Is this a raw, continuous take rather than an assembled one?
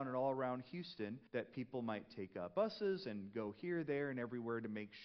no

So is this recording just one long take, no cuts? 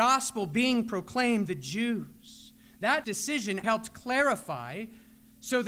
no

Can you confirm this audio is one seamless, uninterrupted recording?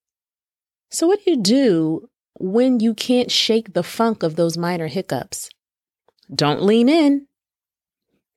yes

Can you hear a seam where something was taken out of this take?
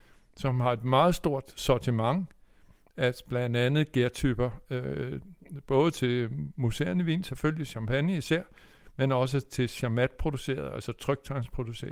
no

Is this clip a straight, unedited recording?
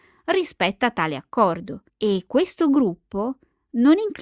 no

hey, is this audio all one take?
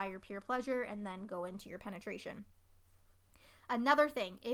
yes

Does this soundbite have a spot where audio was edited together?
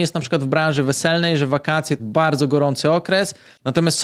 yes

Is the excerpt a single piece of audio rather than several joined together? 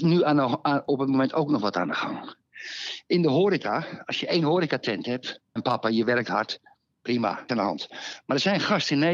no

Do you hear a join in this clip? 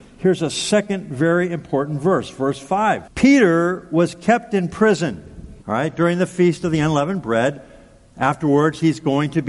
yes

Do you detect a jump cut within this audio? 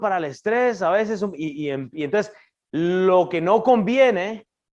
no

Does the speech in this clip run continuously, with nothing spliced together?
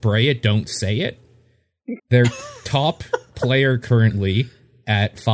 no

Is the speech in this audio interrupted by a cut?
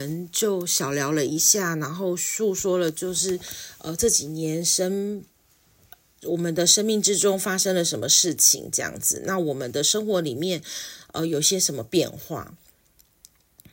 no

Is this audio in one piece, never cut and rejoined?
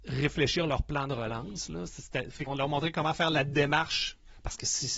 no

